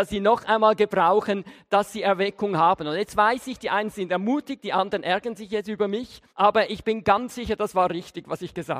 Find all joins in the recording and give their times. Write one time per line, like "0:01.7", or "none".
0:06.3